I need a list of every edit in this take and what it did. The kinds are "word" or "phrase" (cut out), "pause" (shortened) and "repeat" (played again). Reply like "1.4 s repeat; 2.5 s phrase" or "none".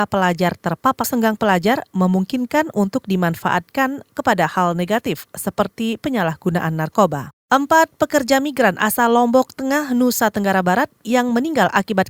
1.0 s phrase; 7.4 s pause